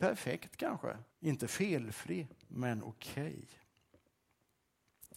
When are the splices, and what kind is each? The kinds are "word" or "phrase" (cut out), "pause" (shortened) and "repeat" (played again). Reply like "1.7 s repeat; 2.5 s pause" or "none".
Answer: 1.1 s pause; 2.4 s pause